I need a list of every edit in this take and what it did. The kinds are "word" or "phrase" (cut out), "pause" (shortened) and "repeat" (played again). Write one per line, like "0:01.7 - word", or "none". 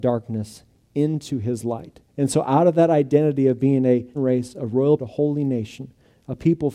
0:02.1 - pause
0:04.2 - word
0:05.0 - word